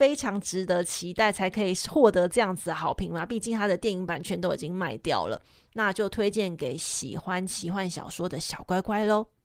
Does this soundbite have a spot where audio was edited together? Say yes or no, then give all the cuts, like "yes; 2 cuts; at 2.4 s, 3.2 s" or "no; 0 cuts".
no; 0 cuts